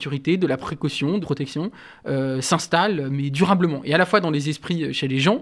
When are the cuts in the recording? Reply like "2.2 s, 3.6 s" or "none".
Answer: 1.2 s

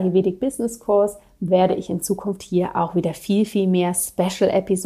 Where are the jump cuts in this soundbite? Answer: none

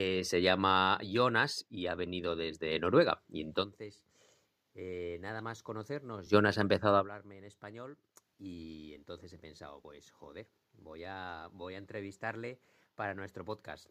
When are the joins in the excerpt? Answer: none

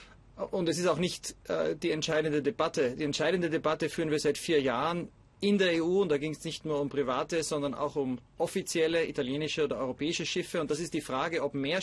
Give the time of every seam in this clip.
none

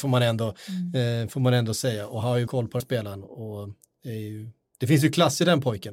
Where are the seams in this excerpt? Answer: 2.5 s, 2.8 s

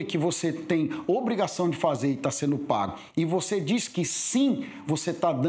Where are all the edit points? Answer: none

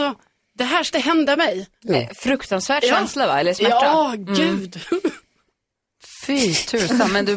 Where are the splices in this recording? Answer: 0.9 s

